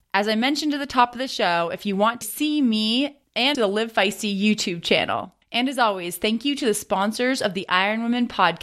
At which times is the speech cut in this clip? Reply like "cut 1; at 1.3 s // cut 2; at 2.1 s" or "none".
cut 1; at 2.2 s // cut 2; at 3.5 s // cut 3; at 5.4 s